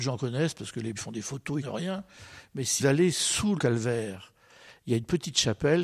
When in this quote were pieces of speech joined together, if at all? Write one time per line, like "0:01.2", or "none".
0:00.9
0:01.6
0:02.8
0:03.6